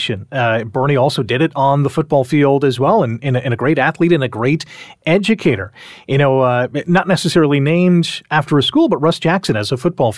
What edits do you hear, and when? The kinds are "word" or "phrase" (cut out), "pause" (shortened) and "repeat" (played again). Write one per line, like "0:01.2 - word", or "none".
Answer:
none